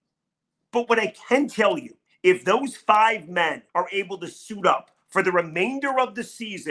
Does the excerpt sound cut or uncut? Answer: cut